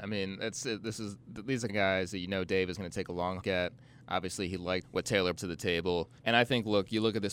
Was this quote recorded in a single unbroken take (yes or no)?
no